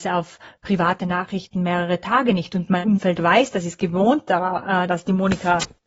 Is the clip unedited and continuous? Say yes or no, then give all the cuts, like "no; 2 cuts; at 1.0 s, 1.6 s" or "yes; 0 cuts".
no; 1 cut; at 4.9 s